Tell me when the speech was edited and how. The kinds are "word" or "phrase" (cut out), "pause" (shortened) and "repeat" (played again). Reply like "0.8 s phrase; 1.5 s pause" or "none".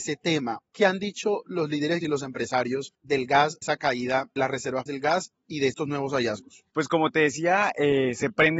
2.0 s word; 3.6 s word; 4.4 s word; 4.9 s word